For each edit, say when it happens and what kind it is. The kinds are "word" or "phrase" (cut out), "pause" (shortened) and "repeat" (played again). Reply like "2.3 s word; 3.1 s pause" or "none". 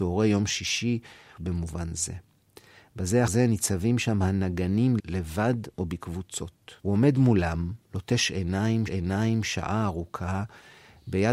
1.4 s phrase; 3.3 s word; 5.0 s word; 6.8 s pause; 7.8 s pause; 8.9 s repeat